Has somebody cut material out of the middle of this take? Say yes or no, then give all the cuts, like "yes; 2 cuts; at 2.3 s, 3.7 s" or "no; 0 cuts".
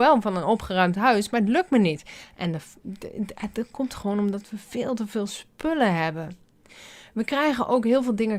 no; 0 cuts